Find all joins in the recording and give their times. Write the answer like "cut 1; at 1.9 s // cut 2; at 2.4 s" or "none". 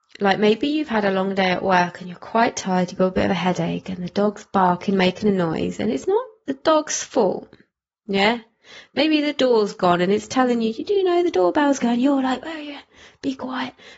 none